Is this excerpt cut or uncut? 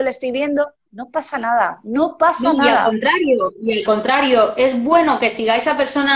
uncut